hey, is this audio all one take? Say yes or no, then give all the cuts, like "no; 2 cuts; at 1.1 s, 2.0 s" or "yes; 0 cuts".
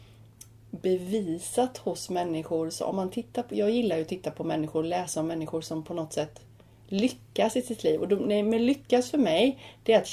yes; 0 cuts